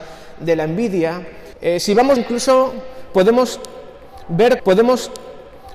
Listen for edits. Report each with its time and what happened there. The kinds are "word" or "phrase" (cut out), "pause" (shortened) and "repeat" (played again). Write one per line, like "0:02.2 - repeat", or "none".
0:01.5 - pause
0:02.2 - phrase
0:04.6 - repeat